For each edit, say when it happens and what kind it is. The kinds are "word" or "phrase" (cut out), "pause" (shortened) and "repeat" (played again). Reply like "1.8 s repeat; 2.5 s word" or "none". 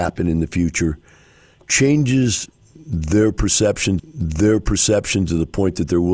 4.0 s repeat